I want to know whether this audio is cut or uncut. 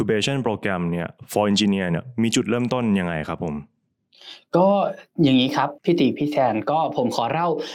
cut